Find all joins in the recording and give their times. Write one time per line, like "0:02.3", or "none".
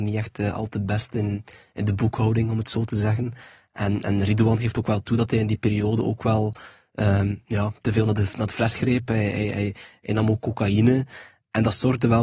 none